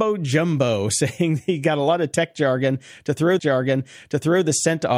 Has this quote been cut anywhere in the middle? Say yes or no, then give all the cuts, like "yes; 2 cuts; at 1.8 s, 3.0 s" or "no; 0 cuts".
yes; 1 cut; at 3.4 s